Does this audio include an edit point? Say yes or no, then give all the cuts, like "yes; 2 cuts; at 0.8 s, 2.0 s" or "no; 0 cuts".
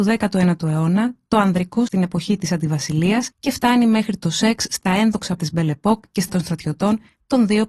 yes; 4 cuts; at 1.9 s, 3.3 s, 5.4 s, 6.3 s